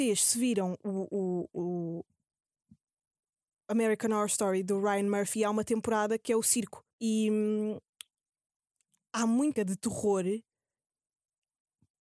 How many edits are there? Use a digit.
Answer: 2